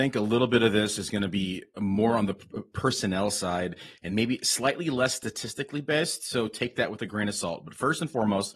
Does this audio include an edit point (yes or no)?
no